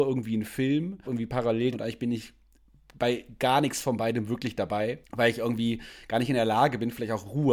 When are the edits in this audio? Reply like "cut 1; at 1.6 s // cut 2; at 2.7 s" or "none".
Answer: cut 1; at 1.0 s // cut 2; at 1.7 s // cut 3; at 5.0 s